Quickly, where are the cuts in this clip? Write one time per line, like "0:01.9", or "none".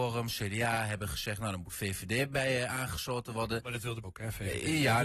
0:04.0